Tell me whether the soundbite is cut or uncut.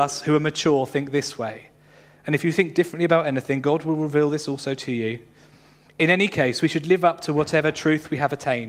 uncut